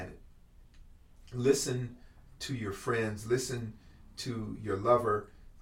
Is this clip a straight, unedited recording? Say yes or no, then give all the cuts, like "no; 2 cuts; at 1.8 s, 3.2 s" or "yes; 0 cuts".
yes; 0 cuts